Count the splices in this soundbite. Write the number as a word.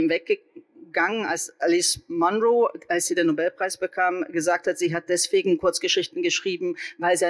zero